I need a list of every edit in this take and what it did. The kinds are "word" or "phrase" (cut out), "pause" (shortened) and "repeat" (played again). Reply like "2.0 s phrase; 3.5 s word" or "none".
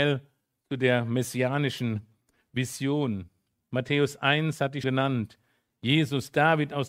4.8 s word